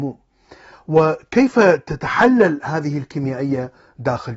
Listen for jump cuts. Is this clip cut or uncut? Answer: uncut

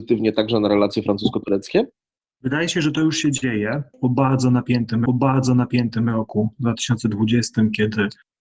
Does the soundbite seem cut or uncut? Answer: cut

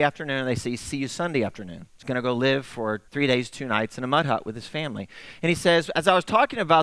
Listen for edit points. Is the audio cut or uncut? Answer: cut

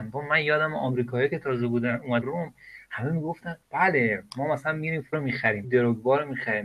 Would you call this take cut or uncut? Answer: cut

